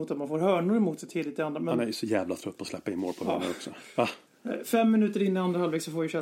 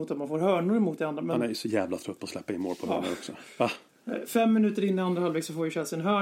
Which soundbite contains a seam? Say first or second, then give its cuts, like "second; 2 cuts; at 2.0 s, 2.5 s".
second; 1 cut; at 1.0 s